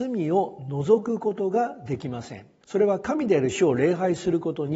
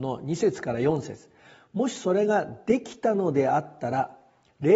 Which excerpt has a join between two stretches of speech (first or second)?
first